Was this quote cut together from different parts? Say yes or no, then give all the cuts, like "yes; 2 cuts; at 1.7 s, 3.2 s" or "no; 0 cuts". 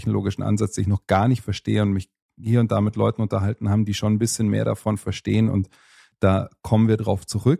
no; 0 cuts